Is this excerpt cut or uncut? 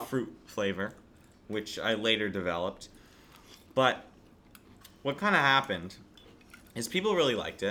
uncut